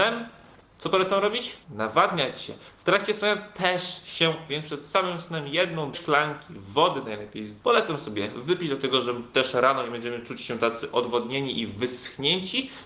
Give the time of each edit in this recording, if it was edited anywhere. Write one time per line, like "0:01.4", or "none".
0:01.6
0:04.5
0:05.9
0:07.6